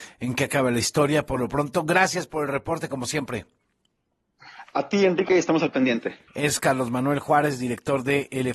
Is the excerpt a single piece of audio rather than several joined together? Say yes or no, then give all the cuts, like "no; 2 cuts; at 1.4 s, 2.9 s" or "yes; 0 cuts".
no; 1 cut; at 6.3 s